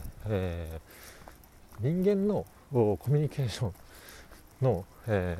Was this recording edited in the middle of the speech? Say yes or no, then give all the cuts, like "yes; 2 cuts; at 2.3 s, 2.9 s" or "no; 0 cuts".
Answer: no; 0 cuts